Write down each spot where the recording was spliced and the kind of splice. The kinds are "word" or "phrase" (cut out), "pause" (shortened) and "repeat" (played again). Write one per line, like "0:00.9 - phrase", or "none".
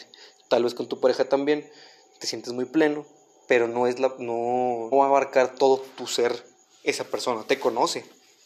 0:04.9 - word